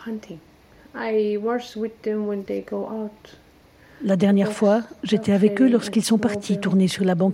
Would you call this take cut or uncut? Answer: uncut